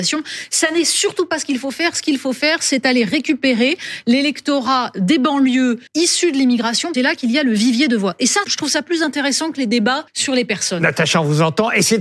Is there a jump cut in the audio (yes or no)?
yes